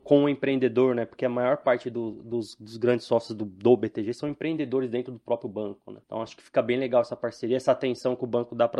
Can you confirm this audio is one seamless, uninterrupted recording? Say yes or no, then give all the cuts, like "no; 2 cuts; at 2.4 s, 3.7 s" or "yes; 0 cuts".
no; 1 cut; at 6.0 s